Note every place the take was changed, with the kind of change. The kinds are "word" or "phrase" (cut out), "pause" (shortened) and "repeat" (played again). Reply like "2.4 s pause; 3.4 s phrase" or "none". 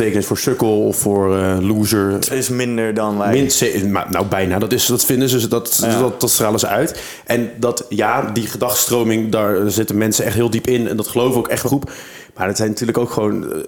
2.3 s word; 11.7 s phrase